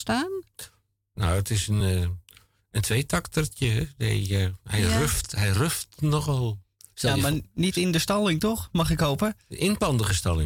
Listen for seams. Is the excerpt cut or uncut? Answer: uncut